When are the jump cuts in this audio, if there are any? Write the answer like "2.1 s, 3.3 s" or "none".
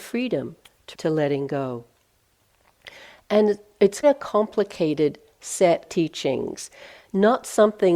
0.9 s, 4.0 s, 5.9 s